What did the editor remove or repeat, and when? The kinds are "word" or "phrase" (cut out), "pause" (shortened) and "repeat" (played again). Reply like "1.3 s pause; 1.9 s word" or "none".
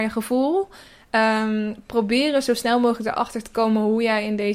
none